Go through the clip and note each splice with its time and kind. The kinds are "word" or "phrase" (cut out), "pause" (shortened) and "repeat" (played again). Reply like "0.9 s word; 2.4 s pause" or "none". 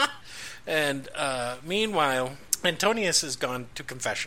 none